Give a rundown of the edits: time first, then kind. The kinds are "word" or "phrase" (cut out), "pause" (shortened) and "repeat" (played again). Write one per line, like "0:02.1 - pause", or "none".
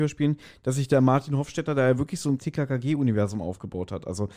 0:02.4 - phrase